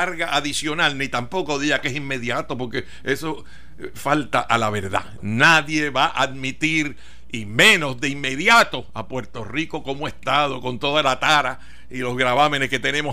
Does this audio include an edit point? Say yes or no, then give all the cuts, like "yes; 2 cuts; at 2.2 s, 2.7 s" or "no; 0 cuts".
no; 0 cuts